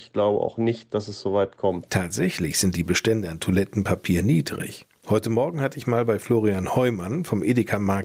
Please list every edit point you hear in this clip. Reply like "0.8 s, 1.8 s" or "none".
none